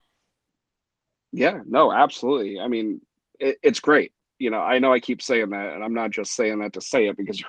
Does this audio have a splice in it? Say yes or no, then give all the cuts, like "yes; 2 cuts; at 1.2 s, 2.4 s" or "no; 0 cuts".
no; 0 cuts